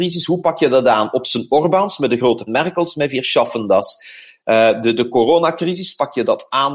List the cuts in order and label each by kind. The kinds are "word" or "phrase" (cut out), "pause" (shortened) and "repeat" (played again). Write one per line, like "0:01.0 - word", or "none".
0:02.5 - phrase